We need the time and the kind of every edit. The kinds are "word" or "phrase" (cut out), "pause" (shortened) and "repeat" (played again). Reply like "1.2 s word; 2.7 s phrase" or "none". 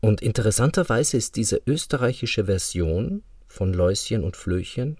none